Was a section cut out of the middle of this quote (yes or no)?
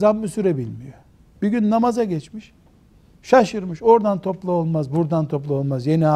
no